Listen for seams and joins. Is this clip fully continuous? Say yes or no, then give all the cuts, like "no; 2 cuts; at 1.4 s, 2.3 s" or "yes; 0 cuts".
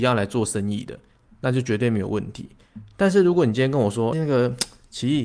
no; 1 cut; at 4.1 s